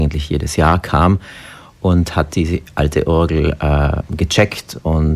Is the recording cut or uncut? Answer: uncut